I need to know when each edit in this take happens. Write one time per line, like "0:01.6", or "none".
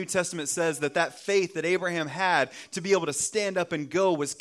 none